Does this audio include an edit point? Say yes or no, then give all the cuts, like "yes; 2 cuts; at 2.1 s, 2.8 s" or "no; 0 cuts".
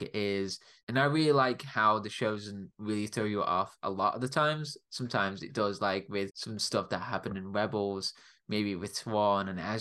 no; 0 cuts